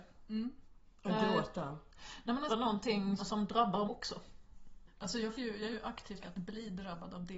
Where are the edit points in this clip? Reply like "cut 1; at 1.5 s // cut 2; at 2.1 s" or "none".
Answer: cut 1; at 2.5 s // cut 2; at 3.2 s // cut 3; at 3.8 s // cut 4; at 5.3 s // cut 5; at 5.7 s // cut 6; at 6.2 s